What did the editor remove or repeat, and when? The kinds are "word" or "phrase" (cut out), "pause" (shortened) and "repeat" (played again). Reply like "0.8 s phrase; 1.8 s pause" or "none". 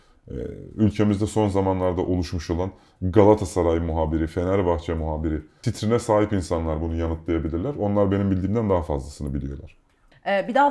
none